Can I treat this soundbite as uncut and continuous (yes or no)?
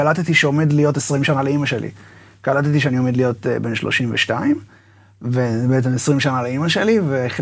yes